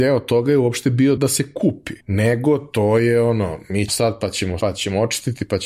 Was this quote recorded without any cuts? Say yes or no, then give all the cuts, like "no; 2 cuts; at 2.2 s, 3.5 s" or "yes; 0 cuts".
no; 4 cuts; at 1.2 s, 2.0 s, 3.9 s, 4.6 s